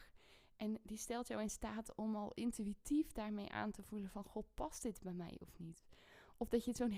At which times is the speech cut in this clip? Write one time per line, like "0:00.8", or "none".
none